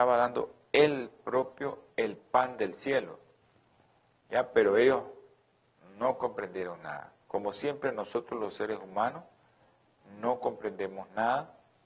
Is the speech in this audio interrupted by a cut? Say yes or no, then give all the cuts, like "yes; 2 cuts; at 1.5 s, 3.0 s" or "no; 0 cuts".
no; 0 cuts